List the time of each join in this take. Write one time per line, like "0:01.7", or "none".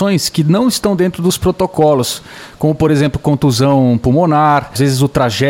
none